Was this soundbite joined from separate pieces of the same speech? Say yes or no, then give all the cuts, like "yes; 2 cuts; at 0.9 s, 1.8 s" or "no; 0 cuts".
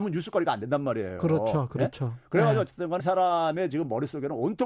yes; 1 cut; at 3.0 s